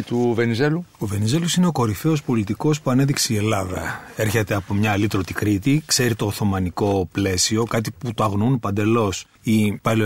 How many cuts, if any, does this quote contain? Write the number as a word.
one